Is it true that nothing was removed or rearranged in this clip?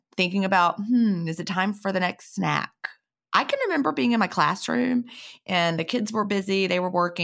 yes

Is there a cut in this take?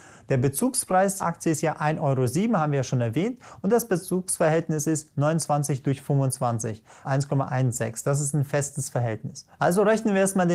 yes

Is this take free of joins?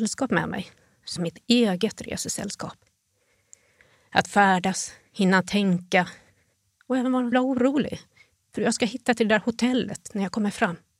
no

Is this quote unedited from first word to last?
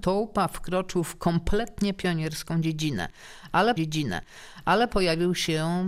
no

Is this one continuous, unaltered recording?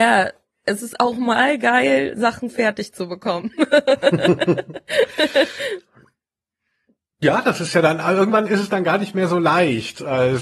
yes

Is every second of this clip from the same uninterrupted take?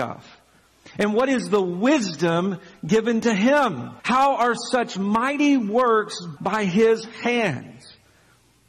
no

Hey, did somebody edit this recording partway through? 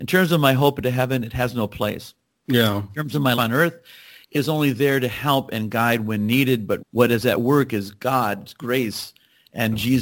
yes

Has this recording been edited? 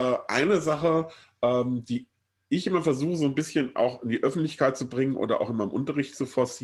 no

